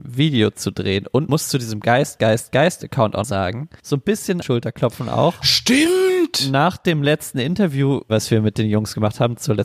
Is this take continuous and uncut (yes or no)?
no